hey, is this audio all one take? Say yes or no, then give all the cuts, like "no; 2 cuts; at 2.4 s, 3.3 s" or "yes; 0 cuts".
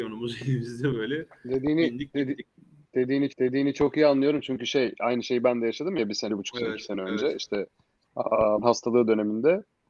no; 3 cuts; at 3.3 s, 6.3 s, 8.6 s